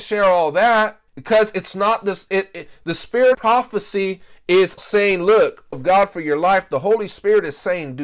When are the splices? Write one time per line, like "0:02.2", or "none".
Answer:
0:01.1
0:02.3
0:03.3
0:04.8
0:05.7